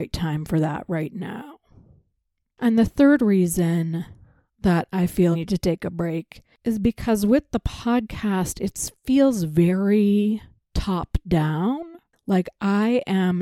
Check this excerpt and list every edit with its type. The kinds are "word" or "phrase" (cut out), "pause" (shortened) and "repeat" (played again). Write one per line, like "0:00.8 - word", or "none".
0:05.3 - word